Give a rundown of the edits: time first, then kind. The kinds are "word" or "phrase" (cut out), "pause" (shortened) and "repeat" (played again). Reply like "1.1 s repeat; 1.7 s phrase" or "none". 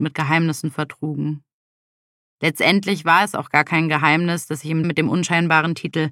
4.8 s word